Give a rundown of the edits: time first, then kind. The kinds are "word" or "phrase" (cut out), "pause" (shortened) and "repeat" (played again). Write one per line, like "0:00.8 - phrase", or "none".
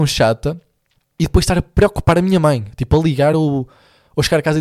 none